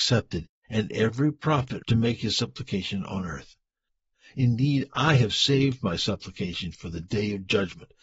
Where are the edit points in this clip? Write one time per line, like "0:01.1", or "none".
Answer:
0:01.8